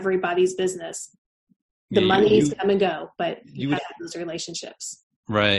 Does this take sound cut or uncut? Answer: cut